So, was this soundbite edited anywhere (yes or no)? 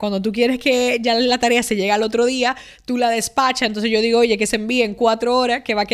no